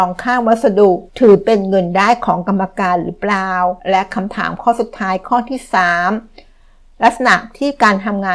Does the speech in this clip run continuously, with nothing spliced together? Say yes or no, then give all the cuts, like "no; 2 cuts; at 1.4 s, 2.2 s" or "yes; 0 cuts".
no; 2 cuts; at 1.1 s, 3.8 s